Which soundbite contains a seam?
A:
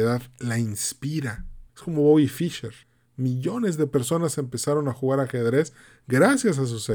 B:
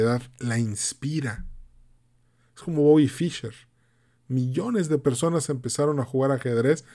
A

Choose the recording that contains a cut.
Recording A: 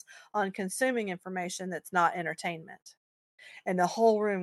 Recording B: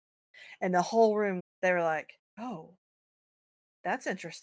B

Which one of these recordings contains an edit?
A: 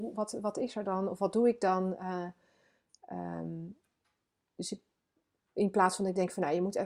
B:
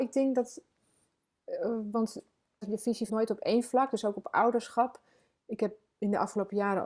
B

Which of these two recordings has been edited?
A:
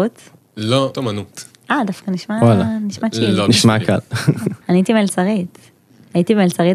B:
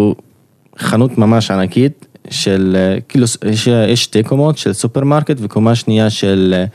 A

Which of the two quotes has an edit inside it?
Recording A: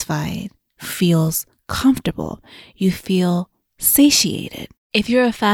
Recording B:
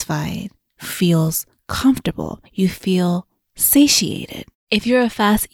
B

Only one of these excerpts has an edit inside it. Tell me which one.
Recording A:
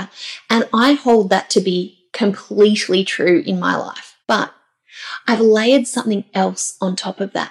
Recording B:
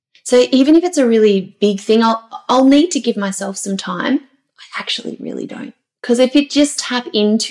A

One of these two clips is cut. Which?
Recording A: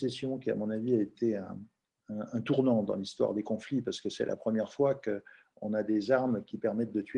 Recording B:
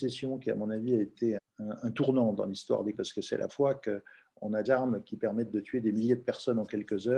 B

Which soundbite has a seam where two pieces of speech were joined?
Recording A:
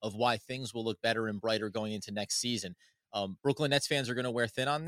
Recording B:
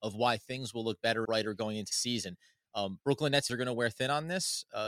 B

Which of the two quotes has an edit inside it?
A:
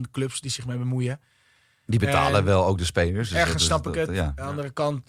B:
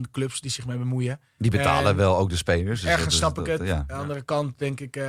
B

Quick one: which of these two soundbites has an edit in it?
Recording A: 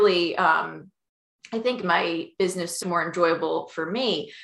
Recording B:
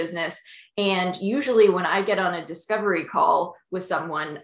A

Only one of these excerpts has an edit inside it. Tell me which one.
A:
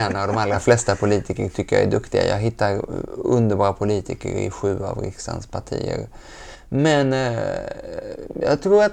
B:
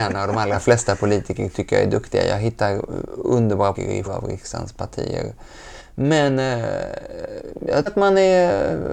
B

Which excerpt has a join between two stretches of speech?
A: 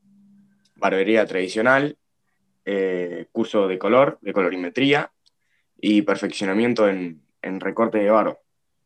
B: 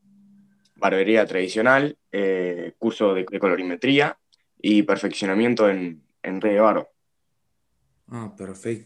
B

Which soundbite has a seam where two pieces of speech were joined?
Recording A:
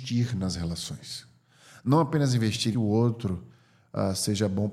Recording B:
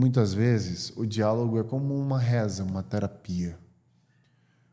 A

